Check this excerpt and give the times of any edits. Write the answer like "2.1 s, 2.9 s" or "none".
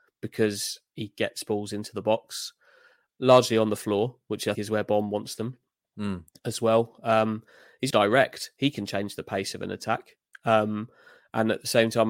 3.1 s, 4.5 s, 7.9 s